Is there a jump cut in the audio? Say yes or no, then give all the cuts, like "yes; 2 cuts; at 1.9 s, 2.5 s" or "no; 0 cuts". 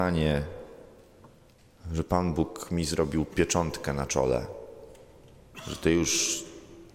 no; 0 cuts